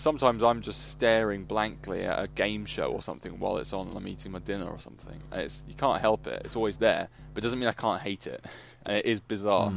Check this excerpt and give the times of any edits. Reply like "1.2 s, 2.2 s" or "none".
none